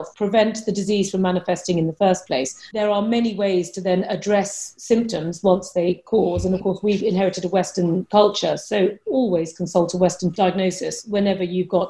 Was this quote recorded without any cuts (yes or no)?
yes